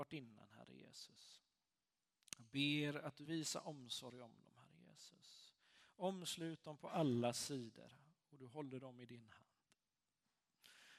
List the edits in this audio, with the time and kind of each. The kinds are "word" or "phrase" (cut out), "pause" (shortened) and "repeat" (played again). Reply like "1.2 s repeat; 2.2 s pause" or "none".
3.3 s word